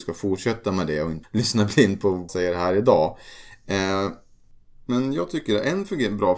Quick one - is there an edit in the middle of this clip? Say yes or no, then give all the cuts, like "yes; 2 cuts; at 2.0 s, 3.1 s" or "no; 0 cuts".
yes; 2 cuts; at 1.2 s, 2.3 s